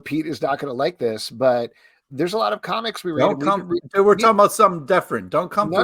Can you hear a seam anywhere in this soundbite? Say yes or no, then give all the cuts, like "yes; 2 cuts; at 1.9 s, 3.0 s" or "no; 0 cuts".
no; 0 cuts